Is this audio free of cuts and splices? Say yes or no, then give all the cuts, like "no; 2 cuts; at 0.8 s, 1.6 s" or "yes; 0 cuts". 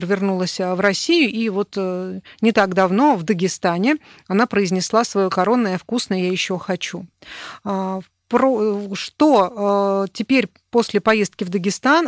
yes; 0 cuts